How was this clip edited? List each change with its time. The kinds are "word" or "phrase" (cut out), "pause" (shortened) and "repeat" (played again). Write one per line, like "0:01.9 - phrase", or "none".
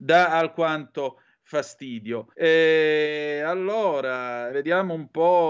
0:02.3 - pause
0:04.5 - word